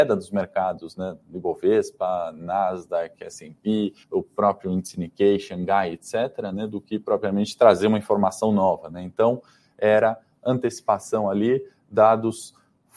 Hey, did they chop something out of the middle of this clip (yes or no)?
yes